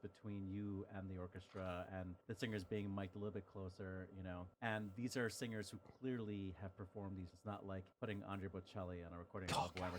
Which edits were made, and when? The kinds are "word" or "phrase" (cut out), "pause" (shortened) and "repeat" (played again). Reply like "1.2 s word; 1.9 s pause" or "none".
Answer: 2.2 s pause; 4.5 s pause; 7.3 s word; 7.9 s pause